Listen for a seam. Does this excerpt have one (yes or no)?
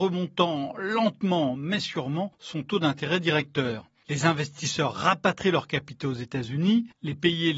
no